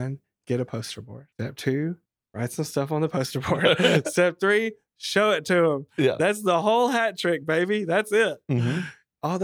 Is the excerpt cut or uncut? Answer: cut